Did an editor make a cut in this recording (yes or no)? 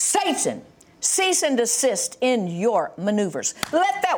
no